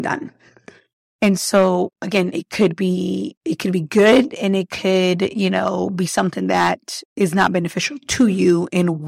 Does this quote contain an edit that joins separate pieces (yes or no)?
no